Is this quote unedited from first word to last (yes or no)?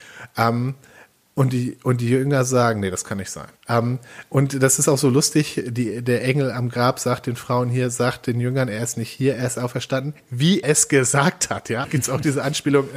no